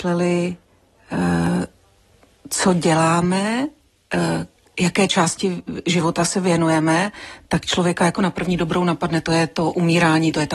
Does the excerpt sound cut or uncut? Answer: uncut